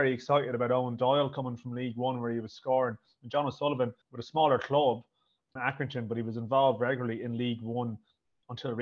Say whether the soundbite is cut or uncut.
cut